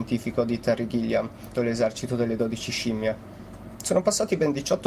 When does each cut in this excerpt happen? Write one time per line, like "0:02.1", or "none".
0:01.5